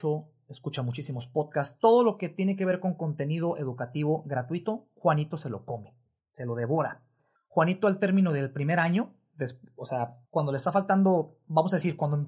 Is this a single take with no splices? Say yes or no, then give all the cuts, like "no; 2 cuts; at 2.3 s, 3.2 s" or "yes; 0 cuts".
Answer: no; 3 cuts; at 6.2 s, 7.4 s, 10.3 s